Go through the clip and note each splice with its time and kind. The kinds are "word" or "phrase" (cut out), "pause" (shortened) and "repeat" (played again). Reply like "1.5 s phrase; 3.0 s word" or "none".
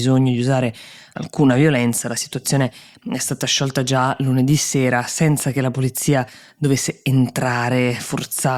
none

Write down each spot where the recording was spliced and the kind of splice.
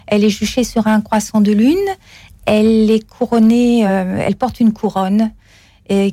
none

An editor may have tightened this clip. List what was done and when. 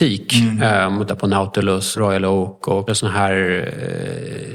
1.1 s word; 1.9 s word; 2.9 s word

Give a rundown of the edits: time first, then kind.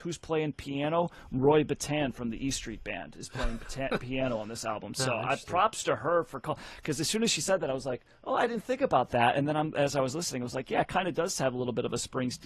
none

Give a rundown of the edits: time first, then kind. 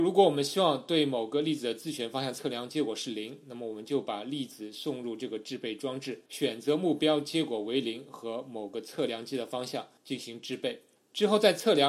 6.3 s pause; 10.0 s pause; 11.0 s pause

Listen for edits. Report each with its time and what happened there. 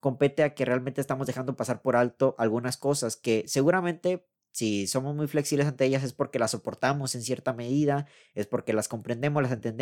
none

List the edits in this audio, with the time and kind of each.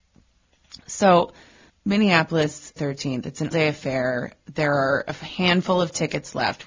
1.7 s word; 2.8 s word; 3.5 s word

